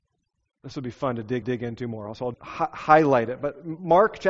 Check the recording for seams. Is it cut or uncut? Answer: cut